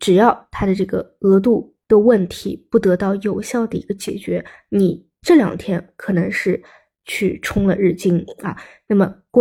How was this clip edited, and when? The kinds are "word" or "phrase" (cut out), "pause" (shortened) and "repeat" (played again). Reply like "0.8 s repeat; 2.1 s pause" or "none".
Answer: 1.8 s pause